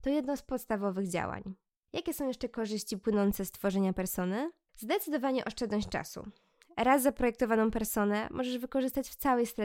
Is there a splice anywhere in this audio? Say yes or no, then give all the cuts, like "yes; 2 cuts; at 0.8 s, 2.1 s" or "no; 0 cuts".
no; 0 cuts